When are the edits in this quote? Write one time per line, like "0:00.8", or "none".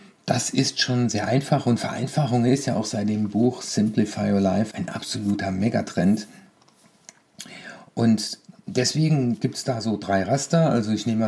0:04.7